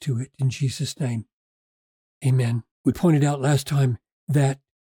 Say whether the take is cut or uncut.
cut